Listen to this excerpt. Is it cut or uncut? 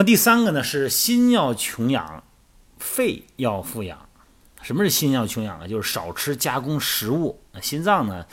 uncut